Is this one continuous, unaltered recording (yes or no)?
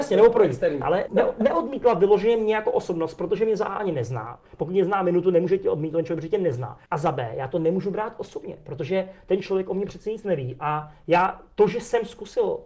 no